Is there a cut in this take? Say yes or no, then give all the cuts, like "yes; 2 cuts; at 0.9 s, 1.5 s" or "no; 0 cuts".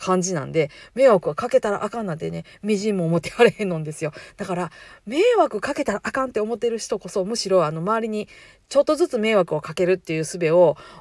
no; 0 cuts